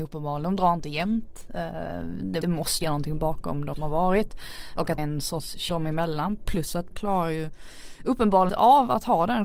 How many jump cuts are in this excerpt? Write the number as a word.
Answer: seven